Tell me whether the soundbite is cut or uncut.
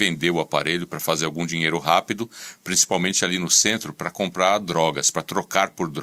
uncut